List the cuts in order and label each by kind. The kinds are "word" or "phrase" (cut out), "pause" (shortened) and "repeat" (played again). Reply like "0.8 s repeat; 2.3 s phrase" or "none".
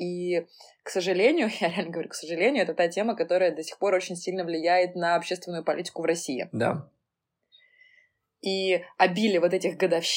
none